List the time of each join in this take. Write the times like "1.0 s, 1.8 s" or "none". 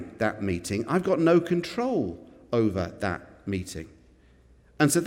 none